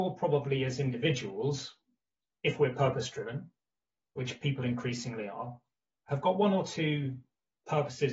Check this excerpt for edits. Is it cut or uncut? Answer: uncut